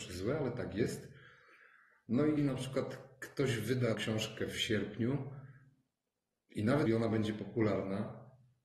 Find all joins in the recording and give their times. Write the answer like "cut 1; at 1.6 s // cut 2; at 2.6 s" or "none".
cut 1; at 2.4 s // cut 2; at 3.9 s // cut 3; at 6.9 s